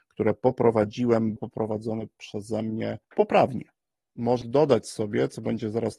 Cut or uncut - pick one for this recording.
cut